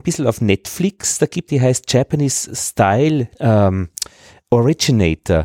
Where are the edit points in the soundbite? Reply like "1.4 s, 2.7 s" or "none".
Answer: 1.5 s, 3.3 s